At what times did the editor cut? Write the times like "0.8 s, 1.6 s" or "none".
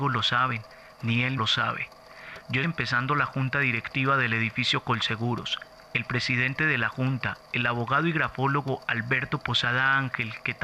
1.4 s, 2.6 s